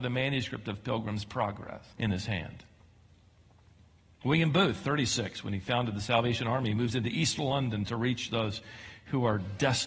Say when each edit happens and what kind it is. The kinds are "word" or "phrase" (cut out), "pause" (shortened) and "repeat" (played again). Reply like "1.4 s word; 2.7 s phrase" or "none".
1.9 s pause